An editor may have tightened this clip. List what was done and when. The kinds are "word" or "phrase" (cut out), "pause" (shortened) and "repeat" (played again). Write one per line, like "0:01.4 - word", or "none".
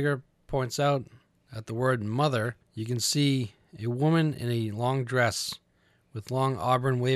0:02.6 - pause